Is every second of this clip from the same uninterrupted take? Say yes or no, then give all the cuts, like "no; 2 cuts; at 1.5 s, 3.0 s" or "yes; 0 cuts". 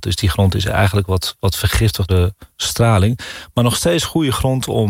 no; 1 cut; at 2.1 s